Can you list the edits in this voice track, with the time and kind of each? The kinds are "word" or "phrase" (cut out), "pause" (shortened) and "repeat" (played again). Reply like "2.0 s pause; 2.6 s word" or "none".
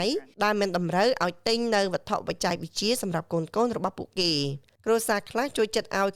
none